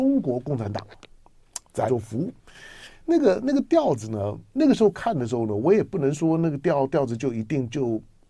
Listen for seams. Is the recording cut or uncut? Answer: cut